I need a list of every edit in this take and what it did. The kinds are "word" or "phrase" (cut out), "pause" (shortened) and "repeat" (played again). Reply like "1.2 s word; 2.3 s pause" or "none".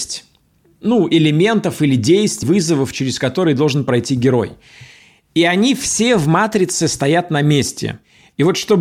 2.4 s word